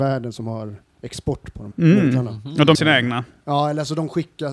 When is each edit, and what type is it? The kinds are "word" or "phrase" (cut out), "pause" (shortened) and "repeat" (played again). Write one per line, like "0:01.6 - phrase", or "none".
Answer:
0:01.7 - word
0:02.7 - word